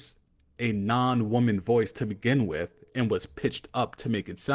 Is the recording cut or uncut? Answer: uncut